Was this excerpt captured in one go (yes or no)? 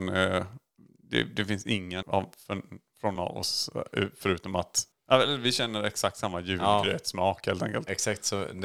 no